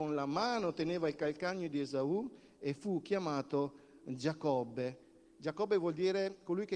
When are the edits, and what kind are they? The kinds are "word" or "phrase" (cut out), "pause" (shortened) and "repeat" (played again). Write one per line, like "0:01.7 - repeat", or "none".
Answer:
none